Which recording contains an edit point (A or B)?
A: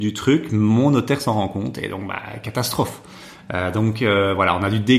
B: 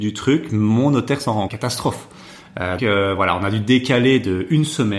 B